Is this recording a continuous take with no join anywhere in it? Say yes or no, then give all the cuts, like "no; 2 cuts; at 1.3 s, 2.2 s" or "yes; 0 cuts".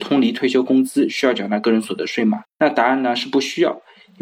no; 1 cut; at 2.5 s